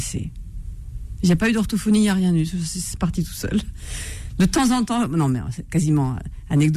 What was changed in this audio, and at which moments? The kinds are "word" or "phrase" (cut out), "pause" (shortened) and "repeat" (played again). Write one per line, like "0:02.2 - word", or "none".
none